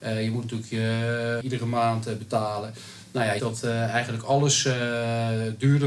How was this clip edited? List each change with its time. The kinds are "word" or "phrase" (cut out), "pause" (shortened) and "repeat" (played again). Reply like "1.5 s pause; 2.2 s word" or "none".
1.4 s word; 3.4 s word